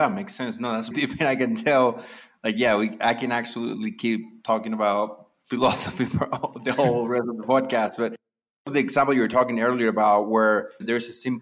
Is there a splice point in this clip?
yes; 1 cut; at 0.9 s

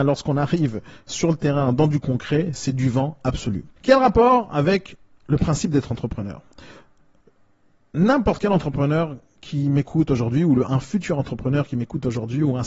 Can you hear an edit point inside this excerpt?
yes; 1 cut; at 3.8 s

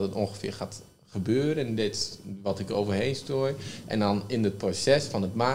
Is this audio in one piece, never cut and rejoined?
yes; 0 cuts

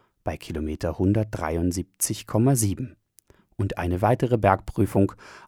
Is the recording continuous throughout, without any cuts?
yes; 0 cuts

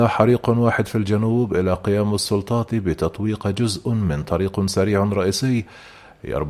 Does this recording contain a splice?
no; 0 cuts

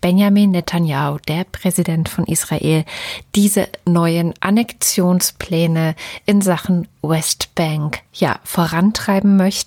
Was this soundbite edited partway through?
yes; 1 cut; at 8.1 s

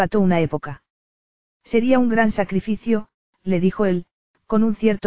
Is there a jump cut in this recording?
no; 0 cuts

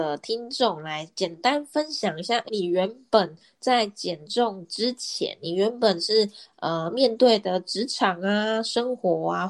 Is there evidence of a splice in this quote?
yes; 1 cut; at 2.5 s

